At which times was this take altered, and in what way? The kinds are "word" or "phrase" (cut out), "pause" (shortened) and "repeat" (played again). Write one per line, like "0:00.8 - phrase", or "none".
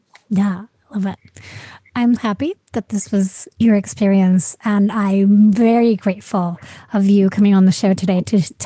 0:02.2 - word